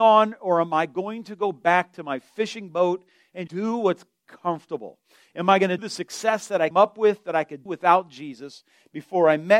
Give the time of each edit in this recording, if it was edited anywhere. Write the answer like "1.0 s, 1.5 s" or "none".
3.5 s, 5.8 s, 6.7 s, 7.7 s